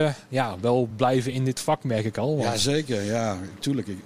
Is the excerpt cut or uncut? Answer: uncut